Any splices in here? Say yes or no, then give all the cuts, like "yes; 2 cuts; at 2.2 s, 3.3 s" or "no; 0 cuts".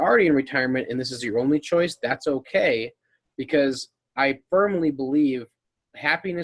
no; 0 cuts